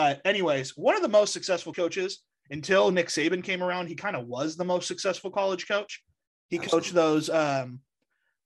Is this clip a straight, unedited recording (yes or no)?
no